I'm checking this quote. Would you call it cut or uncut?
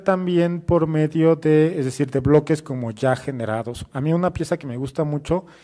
uncut